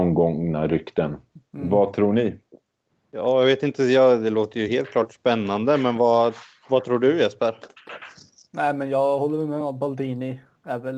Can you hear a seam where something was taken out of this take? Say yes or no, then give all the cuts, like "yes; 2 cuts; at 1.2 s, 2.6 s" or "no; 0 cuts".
no; 0 cuts